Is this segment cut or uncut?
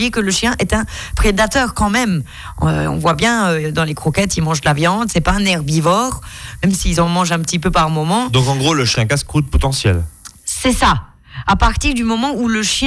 cut